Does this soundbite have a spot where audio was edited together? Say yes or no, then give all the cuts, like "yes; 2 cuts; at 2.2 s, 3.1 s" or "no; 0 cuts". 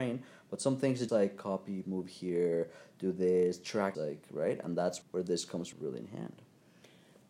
yes; 5 cuts; at 1.1 s, 1.8 s, 3.9 s, 5.0 s, 5.7 s